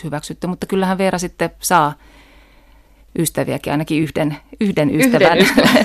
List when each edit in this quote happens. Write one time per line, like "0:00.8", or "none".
none